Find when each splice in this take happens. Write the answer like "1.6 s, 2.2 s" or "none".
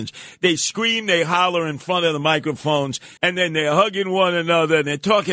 3.2 s